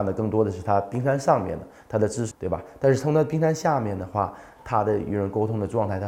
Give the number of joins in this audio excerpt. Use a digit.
1